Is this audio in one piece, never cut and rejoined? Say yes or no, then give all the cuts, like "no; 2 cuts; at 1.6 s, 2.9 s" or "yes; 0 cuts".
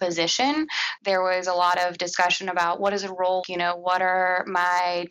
no; 2 cuts; at 1.0 s, 3.4 s